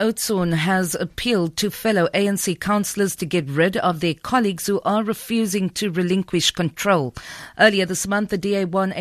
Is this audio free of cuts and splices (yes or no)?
yes